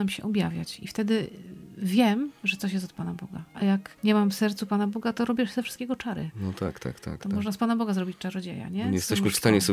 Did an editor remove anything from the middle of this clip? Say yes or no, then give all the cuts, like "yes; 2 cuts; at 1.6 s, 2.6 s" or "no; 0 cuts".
yes; 1 cut; at 4.0 s